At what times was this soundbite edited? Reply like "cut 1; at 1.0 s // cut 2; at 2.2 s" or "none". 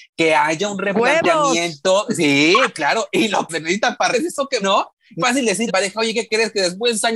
cut 1; at 2.7 s // cut 2; at 3.5 s // cut 3; at 4.1 s // cut 4; at 4.6 s // cut 5; at 5.2 s // cut 6; at 5.7 s